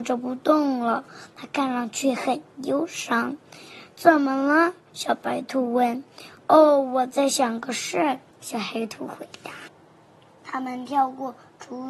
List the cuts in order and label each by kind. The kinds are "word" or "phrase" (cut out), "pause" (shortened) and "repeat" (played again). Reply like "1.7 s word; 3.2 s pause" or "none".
8.3 s pause